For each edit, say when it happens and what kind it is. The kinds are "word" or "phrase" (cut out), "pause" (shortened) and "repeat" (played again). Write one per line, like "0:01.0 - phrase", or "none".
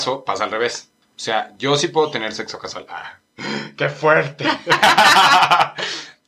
0:01.0 - pause